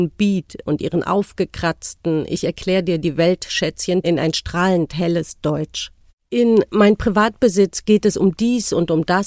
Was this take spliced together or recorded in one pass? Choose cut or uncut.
cut